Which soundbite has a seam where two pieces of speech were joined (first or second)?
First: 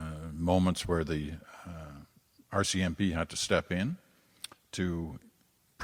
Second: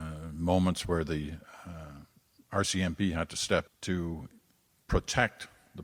second